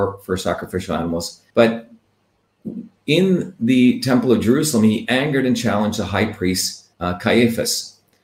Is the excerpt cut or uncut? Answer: cut